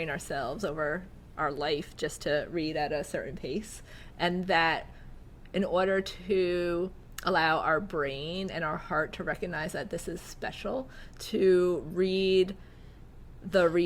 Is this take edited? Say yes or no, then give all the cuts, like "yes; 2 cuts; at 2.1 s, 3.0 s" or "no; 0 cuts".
no; 0 cuts